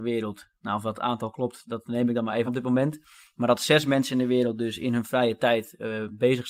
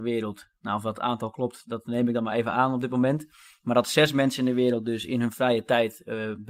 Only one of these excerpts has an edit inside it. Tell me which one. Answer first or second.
first